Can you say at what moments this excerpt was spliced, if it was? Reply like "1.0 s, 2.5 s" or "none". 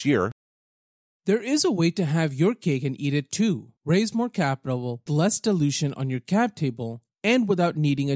3.8 s, 5.1 s